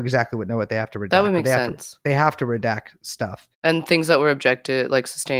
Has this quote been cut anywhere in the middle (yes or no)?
yes